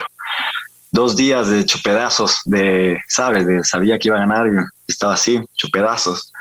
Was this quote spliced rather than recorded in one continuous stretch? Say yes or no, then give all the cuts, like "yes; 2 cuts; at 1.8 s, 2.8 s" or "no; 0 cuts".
yes; 1 cut; at 4.7 s